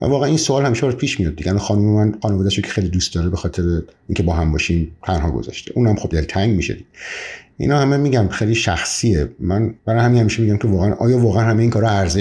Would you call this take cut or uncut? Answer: cut